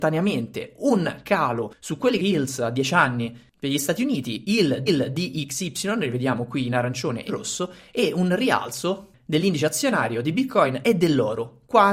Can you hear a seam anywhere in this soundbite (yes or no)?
yes